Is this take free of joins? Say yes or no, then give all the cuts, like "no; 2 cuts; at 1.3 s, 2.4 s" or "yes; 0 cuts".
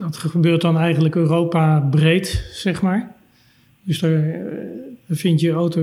yes; 0 cuts